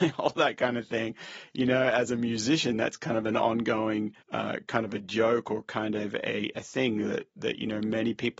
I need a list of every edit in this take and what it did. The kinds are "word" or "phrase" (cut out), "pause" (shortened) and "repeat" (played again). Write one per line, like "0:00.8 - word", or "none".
0:04.2 - pause

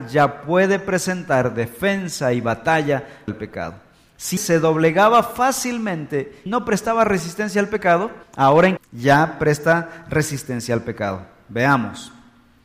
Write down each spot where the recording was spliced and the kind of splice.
0:03.3 - word
0:04.4 - word
0:06.5 - word
0:08.2 - pause
0:08.8 - word

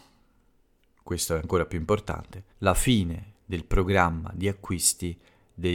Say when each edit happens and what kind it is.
0:02.5 - pause

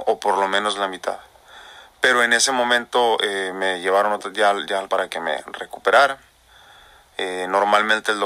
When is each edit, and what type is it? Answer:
0:04.9 - word

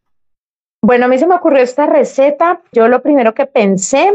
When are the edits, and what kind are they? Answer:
0:02.7 - word

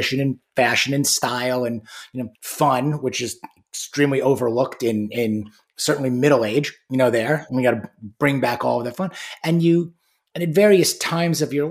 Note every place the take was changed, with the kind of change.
0:02.4 - pause

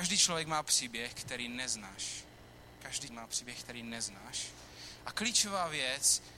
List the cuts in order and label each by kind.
0:03.1 - word

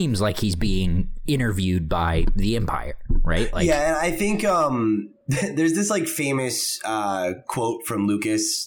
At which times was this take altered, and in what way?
0:05.2 - pause

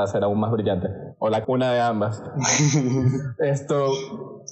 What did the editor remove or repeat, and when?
0:01.4 - word

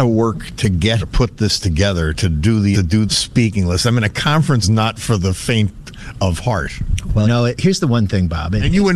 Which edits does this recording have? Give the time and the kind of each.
0:01.0 - word
0:02.7 - word
0:03.1 - word
0:04.6 - word
0:07.2 - word
0:07.6 - word

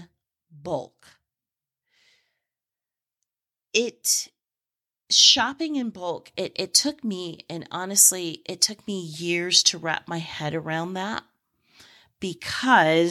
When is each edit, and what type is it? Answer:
none

